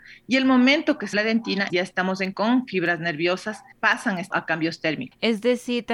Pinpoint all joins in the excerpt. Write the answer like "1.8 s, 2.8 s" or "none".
1.1 s, 1.7 s, 2.3 s, 3.7 s, 4.3 s